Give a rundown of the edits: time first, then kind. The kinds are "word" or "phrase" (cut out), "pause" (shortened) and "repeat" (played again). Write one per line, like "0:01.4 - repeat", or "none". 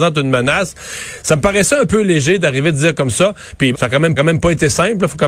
0:03.7 - word
0:04.2 - repeat